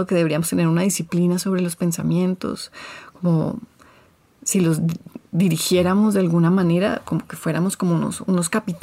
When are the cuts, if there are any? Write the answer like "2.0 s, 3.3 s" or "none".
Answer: none